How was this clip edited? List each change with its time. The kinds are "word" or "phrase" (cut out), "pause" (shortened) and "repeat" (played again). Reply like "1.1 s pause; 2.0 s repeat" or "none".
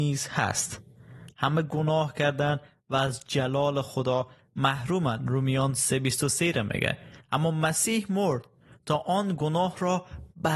none